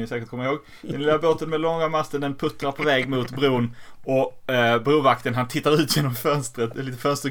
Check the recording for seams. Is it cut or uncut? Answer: uncut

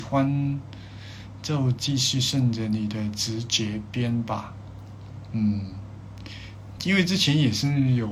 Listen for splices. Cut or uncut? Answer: cut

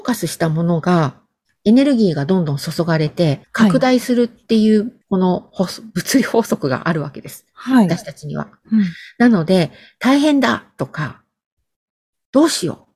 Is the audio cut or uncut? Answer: cut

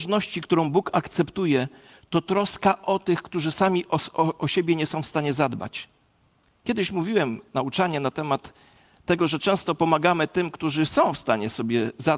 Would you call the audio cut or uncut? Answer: uncut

